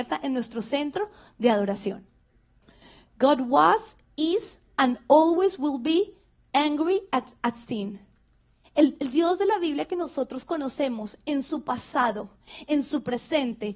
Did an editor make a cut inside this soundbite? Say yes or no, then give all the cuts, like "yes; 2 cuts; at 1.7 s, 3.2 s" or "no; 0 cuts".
no; 0 cuts